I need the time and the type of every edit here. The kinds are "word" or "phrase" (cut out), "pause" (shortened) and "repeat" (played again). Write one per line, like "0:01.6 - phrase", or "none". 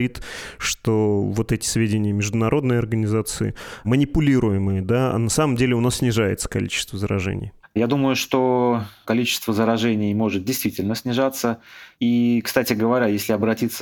0:07.6 - pause